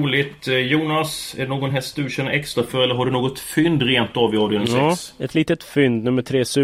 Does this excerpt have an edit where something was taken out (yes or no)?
no